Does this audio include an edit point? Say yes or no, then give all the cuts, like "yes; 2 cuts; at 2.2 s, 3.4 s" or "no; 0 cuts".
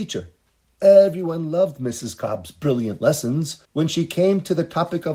yes; 1 cut; at 3.6 s